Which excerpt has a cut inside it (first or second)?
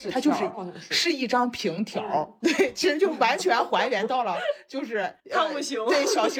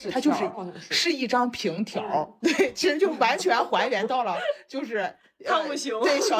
first